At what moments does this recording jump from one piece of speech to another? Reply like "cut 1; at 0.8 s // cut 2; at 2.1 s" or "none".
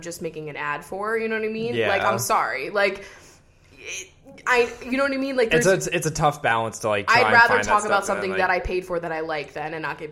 none